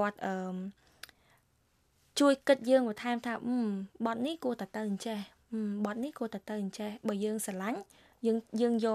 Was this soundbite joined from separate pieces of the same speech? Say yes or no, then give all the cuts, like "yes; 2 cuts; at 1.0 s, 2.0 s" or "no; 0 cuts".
no; 0 cuts